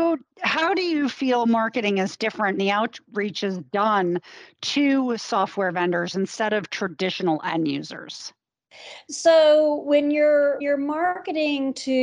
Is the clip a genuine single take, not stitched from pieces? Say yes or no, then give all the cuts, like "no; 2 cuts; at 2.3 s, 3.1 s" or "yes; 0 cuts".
no; 2 cuts; at 2.6 s, 10.6 s